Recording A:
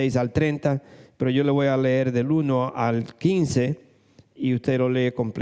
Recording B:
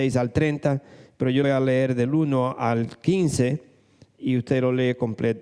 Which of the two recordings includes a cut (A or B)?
B